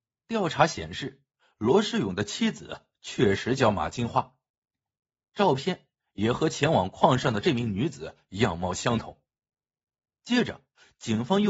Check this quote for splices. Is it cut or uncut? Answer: uncut